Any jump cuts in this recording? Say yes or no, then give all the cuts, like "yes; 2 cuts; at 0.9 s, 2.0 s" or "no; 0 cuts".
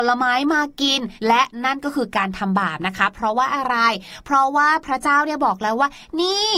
yes; 1 cut; at 1.2 s